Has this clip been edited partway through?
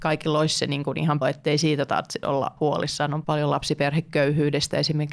yes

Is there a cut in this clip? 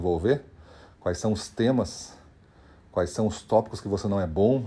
no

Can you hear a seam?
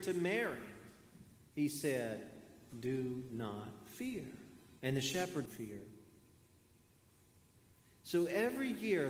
yes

